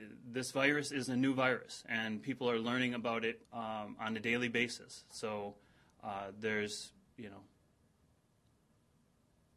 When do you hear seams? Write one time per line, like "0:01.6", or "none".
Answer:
0:03.4